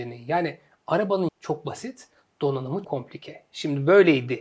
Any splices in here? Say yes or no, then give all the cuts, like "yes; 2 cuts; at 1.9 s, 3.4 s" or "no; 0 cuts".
yes; 2 cuts; at 1.3 s, 2.8 s